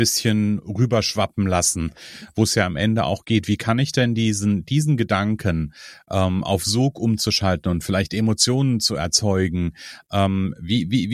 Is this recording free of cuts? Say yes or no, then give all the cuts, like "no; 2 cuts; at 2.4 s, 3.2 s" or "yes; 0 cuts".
yes; 0 cuts